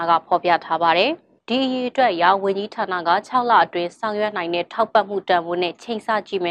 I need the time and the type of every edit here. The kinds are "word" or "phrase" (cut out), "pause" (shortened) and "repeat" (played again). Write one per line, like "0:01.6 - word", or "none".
0:01.4 - pause